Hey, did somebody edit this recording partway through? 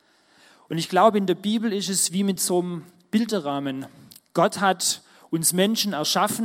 no; 0 cuts

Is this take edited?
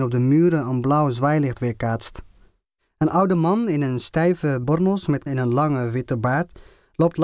yes; 2 cuts; at 4.6 s, 5.3 s

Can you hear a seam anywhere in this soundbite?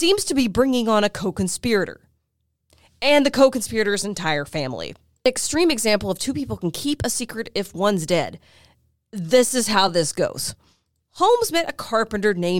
no; 0 cuts

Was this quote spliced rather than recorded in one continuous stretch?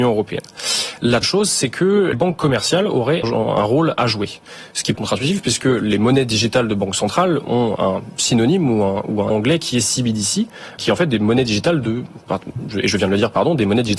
yes; 7 cuts; at 1.2 s, 2.1 s, 3.2 s, 5.0 s, 7.8 s, 9.3 s, 10.8 s

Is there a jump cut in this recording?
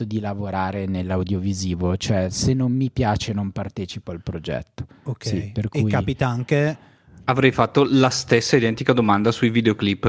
no; 0 cuts

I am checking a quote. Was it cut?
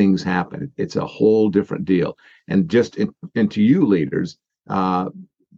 no; 0 cuts

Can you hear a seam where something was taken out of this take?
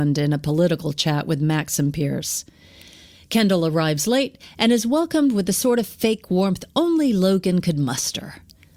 no; 0 cuts

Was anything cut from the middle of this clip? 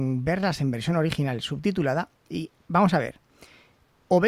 no; 0 cuts

